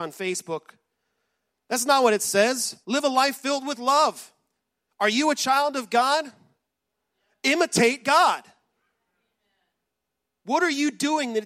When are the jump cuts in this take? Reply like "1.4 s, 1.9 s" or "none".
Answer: 2.8 s